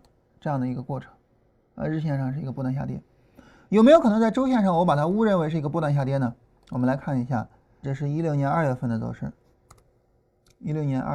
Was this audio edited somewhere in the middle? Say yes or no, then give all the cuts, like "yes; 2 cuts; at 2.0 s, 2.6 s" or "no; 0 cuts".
yes; 1 cut; at 7.8 s